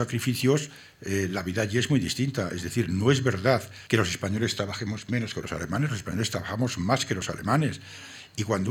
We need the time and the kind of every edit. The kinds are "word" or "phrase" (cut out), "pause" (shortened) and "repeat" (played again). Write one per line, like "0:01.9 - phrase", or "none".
0:03.9 - pause

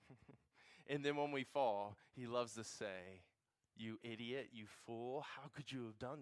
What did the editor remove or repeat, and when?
none

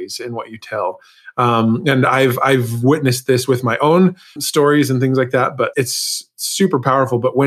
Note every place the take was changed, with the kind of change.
0:04.4 - word
0:05.7 - word

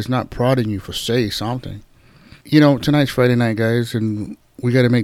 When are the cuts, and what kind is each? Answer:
0:02.4 - pause

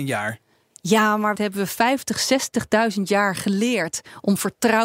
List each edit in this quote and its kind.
0:01.4 - phrase

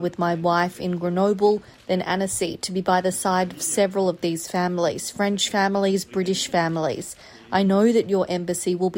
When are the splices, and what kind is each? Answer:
none

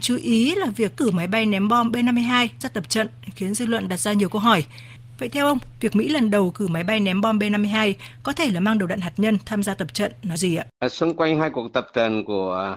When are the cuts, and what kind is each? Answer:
0:00.9 - word
0:02.6 - word
0:10.4 - phrase
0:10.7 - pause

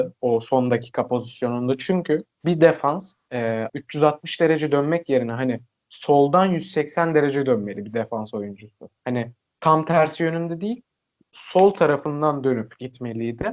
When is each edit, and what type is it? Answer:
0:02.3 - pause
0:03.7 - word
0:09.0 - pause

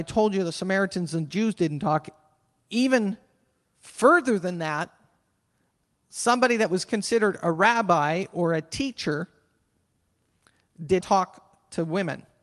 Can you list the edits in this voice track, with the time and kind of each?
0:11.0 - word

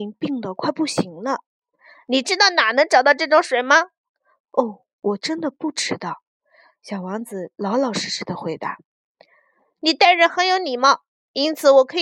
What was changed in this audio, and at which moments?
none

